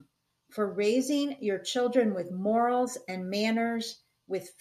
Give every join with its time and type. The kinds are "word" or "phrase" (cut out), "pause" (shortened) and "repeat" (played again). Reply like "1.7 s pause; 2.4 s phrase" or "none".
none